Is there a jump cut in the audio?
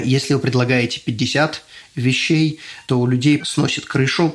yes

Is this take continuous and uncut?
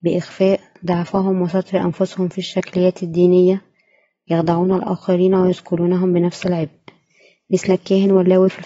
yes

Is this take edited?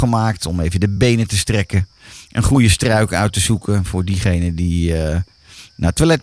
no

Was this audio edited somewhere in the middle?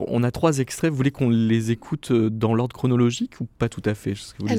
no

